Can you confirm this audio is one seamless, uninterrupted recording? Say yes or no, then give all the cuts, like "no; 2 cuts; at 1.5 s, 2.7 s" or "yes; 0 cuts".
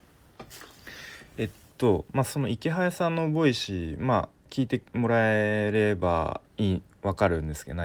no; 1 cut; at 6.5 s